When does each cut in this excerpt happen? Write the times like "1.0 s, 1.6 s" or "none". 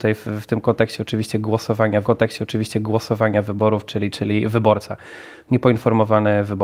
2.0 s